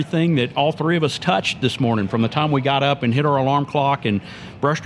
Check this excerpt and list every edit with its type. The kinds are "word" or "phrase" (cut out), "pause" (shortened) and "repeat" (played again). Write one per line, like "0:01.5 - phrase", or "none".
none